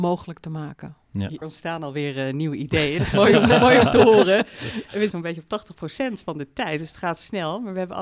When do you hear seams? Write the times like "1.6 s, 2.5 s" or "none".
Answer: 1.4 s, 5.1 s